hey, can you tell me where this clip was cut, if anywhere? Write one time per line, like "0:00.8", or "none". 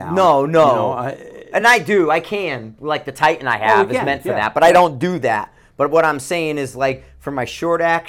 none